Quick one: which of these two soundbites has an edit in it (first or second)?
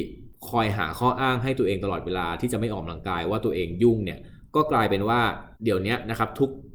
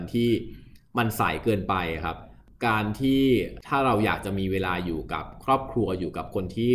first